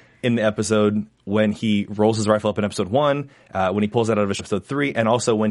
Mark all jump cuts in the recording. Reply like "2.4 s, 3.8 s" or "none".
4.4 s